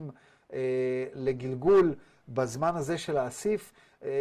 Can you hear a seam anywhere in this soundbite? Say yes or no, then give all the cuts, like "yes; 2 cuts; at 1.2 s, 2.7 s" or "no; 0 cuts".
no; 0 cuts